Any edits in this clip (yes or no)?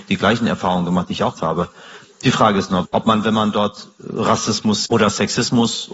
yes